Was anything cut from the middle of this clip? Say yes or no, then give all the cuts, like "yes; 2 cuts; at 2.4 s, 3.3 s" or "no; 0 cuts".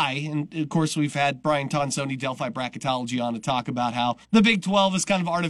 yes; 1 cut; at 4.2 s